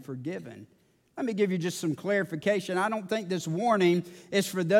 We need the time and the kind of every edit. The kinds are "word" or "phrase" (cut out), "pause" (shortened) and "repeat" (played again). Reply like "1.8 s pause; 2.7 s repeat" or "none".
none

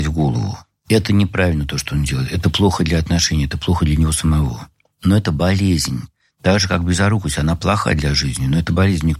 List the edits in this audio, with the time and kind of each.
none

